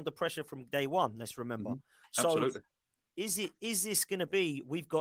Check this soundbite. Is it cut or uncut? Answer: uncut